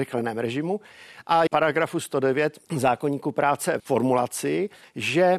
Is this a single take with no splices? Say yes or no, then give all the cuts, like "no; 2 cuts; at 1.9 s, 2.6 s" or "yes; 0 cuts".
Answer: no; 3 cuts; at 1.5 s, 2.7 s, 3.8 s